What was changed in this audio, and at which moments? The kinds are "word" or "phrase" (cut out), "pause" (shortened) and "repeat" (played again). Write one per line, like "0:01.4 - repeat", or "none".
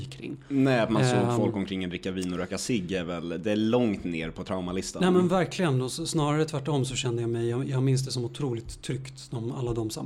none